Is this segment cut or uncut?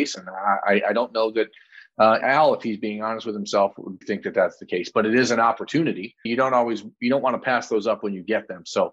cut